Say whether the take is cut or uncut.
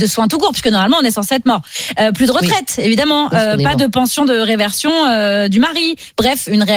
uncut